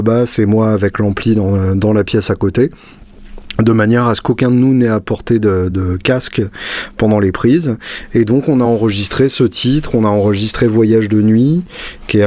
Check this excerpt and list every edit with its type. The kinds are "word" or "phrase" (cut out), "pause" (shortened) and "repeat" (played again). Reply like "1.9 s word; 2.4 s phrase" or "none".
none